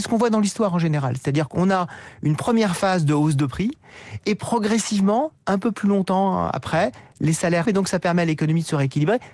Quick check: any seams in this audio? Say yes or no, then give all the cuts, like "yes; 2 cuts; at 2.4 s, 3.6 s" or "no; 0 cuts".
yes; 1 cut; at 7.6 s